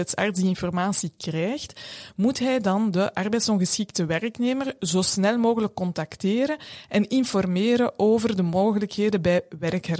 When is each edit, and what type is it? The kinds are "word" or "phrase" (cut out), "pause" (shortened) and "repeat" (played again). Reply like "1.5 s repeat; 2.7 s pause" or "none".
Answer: none

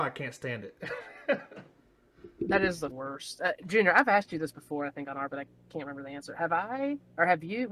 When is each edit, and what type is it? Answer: 1.7 s pause; 2.9 s word; 5.3 s word

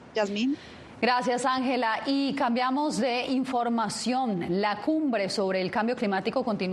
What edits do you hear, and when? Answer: none

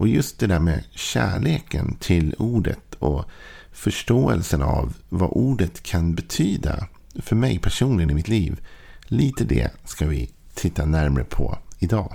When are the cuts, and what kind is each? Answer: none

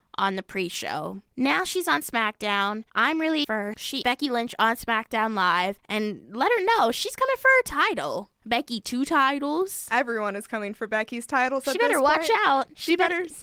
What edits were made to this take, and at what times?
1.3 s pause; 2.9 s pause; 3.4 s word; 4.0 s word

